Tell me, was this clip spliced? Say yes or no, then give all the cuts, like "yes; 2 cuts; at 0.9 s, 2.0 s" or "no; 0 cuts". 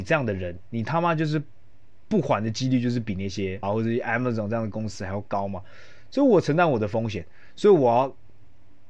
yes; 1 cut; at 3.6 s